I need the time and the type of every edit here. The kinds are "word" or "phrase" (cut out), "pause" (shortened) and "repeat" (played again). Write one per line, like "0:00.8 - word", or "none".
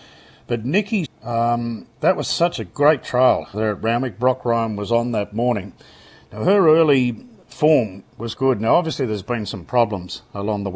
0:01.0 - word
0:03.5 - word
0:08.4 - word